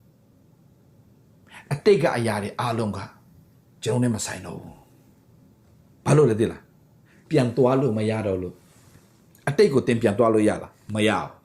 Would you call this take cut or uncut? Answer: uncut